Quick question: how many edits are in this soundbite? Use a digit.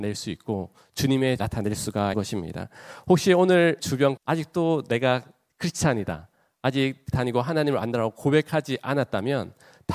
5